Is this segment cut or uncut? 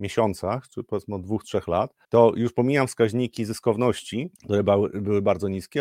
cut